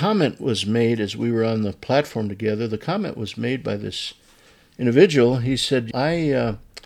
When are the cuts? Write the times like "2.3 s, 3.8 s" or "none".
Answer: 5.9 s

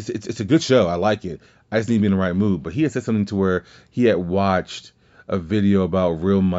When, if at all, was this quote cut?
none

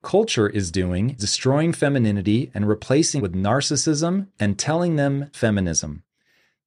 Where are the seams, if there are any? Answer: 1.2 s, 3.2 s, 5.3 s

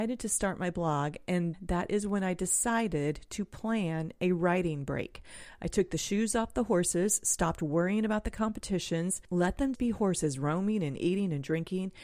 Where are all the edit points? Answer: 1.5 s, 9.7 s

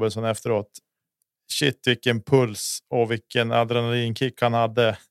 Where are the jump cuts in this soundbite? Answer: none

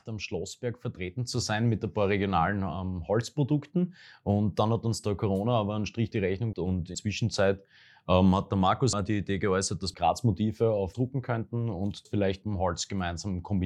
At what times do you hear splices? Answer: 6.1 s, 6.5 s, 6.9 s, 8.9 s, 9.9 s, 10.9 s, 12.1 s, 12.4 s

